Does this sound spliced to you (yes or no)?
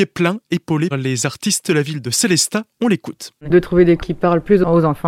yes